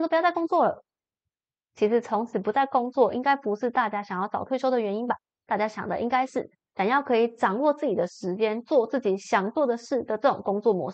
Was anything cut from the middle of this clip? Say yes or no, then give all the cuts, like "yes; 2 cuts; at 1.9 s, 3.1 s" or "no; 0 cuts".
no; 0 cuts